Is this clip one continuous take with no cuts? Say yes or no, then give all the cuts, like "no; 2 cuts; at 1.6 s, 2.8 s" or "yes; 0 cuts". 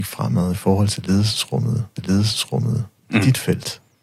no; 1 cut; at 2.0 s